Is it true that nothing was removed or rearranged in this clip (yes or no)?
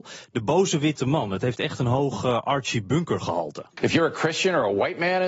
yes